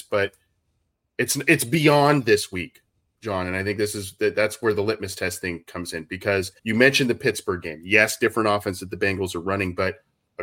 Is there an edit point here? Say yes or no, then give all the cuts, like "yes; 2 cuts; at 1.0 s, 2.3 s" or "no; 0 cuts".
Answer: yes; 1 cut; at 6.6 s